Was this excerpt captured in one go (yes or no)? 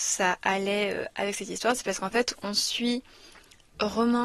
yes